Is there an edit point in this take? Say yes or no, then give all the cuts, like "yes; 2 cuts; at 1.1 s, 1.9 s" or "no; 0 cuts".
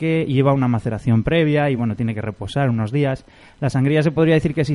no; 0 cuts